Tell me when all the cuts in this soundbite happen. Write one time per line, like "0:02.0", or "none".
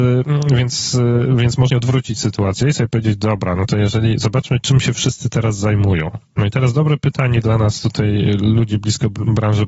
0:01.7
0:06.3